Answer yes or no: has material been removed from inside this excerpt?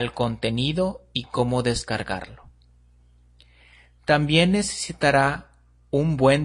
no